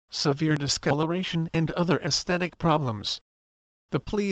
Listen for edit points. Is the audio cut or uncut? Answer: uncut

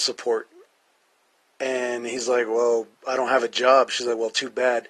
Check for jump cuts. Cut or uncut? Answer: uncut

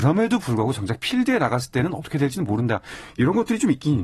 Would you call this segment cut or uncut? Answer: uncut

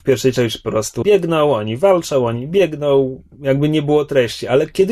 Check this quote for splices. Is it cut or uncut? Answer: cut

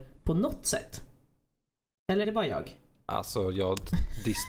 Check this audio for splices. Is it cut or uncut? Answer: cut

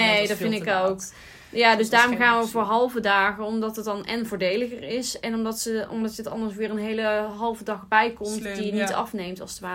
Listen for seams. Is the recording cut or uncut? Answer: uncut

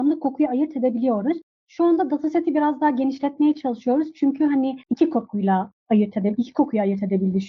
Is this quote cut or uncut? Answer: cut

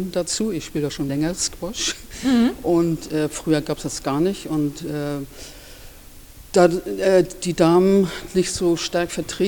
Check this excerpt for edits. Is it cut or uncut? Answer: cut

